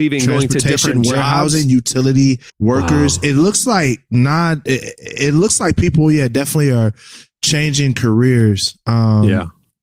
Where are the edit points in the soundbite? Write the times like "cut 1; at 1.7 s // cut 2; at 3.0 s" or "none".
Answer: cut 1; at 2.5 s